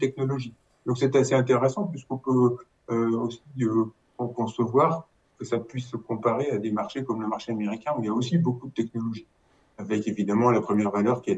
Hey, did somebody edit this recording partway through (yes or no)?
no